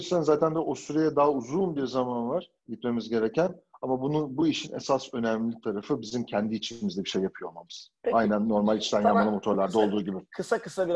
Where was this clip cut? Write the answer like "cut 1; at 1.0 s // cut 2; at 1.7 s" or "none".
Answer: cut 1; at 2.6 s